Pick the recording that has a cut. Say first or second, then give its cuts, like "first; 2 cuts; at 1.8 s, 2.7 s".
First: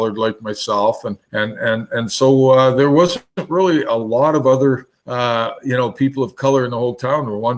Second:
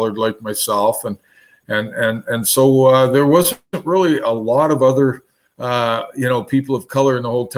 first; 2 cuts; at 1.2 s, 5.0 s